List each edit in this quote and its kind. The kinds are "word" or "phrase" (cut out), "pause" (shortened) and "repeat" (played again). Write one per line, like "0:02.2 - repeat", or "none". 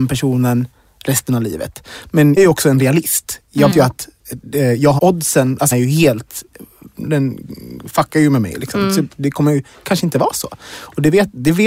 0:02.4 - word
0:03.7 - word
0:05.0 - word
0:05.7 - word